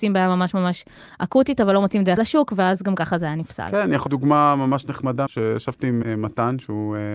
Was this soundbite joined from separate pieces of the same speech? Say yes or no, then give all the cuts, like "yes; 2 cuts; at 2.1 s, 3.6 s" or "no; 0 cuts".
yes; 4 cuts; at 2.2 s, 4.1 s, 5.3 s, 6.0 s